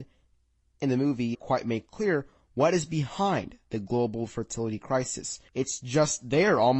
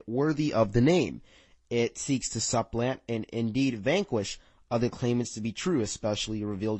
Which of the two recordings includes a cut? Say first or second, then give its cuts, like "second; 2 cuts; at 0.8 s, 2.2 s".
first; 2 cuts; at 1.3 s, 5.5 s